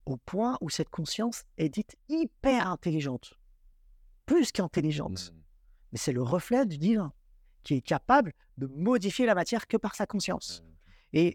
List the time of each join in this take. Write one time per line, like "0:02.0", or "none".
none